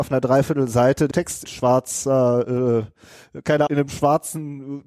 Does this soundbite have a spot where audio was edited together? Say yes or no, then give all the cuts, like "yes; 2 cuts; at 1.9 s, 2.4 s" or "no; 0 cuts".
yes; 3 cuts; at 1.1 s, 1.4 s, 3.7 s